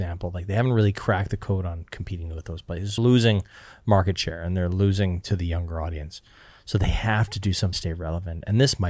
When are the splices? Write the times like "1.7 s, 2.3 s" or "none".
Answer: 3.0 s, 7.7 s